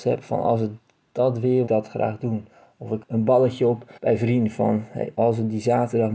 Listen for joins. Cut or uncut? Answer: cut